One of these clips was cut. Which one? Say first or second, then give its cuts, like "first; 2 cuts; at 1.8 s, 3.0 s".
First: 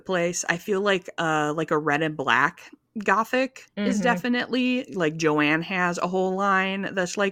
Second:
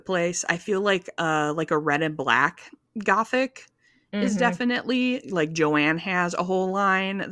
first; 1 cut; at 3.7 s